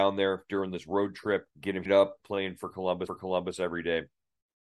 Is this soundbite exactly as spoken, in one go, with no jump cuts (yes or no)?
no